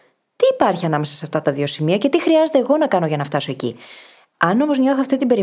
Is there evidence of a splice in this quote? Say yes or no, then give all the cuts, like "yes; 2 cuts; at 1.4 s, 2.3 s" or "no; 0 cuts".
no; 0 cuts